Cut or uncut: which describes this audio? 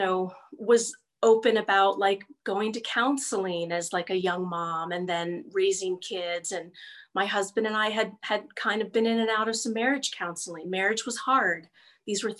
uncut